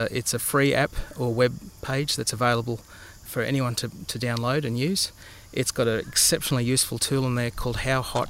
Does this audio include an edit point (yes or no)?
yes